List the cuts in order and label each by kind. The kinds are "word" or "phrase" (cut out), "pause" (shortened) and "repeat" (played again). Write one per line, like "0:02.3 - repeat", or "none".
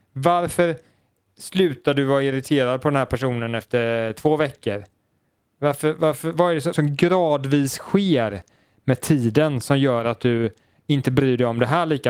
0:06.7 - phrase